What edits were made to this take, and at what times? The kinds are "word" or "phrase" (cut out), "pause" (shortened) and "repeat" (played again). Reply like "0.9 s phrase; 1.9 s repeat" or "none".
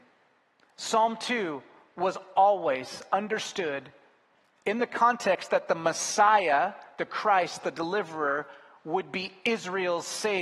none